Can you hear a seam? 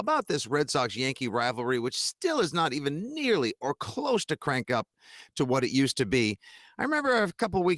no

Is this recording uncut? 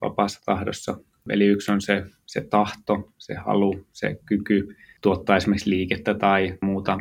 yes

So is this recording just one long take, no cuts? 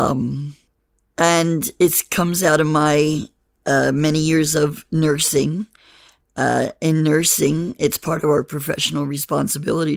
yes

